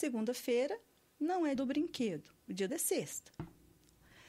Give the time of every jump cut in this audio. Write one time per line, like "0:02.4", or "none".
0:01.6
0:02.7